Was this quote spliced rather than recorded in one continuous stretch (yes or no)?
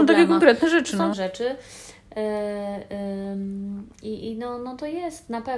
yes